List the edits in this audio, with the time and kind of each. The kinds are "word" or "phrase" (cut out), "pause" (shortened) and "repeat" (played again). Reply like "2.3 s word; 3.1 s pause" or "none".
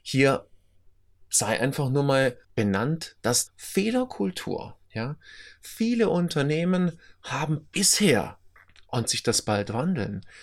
2.4 s pause; 3.5 s word; 4.8 s pause; 9.0 s phrase

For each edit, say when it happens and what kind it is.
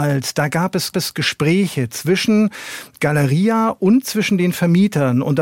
0.9 s repeat

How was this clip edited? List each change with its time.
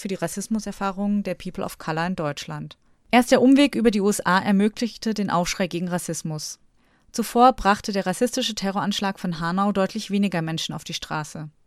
2.9 s pause

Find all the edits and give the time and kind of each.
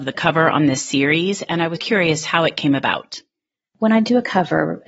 1.8 s word

